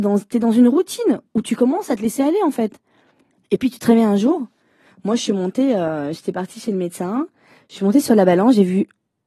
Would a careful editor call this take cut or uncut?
uncut